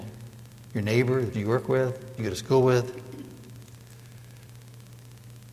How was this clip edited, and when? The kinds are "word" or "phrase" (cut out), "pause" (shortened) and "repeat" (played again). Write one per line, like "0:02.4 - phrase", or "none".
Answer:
0:01.3 - word
0:02.2 - word